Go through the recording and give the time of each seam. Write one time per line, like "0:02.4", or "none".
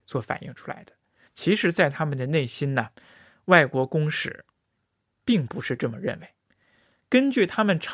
none